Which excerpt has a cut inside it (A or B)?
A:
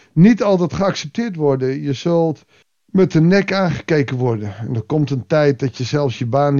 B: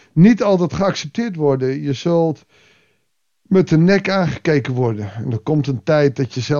A